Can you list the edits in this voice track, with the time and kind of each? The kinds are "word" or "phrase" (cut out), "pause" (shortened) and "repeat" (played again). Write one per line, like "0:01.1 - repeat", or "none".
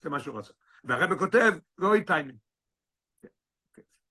none